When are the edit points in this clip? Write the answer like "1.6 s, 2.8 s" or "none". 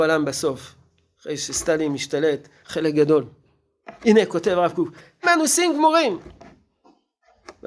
2.6 s, 4.0 s, 5.2 s